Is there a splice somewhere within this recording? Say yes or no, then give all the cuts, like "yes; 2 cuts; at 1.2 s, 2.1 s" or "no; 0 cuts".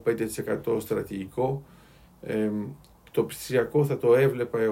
no; 0 cuts